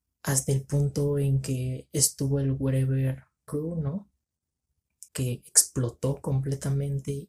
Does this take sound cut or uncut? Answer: cut